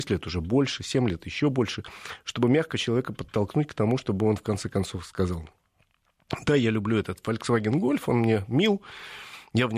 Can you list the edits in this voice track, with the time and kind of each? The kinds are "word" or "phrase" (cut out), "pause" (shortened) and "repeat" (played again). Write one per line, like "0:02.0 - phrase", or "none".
none